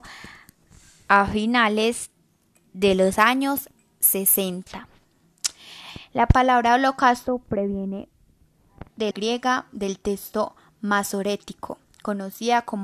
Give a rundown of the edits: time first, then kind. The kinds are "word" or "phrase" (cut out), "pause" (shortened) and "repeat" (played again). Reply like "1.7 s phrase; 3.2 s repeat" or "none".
9.1 s word